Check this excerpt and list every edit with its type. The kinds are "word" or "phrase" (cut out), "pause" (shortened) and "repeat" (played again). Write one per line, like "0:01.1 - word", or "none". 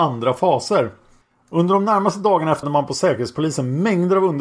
0:01.2 - pause
0:02.6 - phrase